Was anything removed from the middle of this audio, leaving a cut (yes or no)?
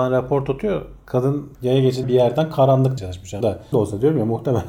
yes